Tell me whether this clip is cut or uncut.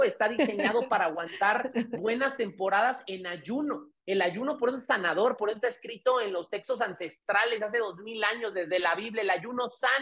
uncut